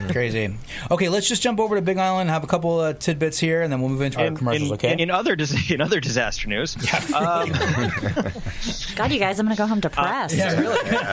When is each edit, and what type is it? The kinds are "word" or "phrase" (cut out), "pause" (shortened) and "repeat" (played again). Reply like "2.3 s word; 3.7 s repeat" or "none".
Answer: 4.1 s word; 5.0 s word